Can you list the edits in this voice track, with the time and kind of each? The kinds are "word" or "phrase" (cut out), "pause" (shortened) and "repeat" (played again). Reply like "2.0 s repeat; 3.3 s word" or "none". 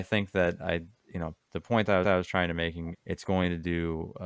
0.9 s pause; 2.0 s repeat; 2.9 s phrase